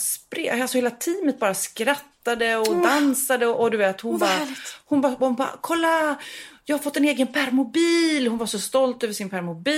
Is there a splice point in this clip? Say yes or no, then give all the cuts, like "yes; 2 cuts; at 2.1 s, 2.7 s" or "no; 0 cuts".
no; 0 cuts